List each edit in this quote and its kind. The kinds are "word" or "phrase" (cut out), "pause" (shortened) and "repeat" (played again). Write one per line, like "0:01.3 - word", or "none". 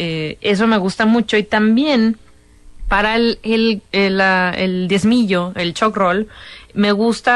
0:03.9 - pause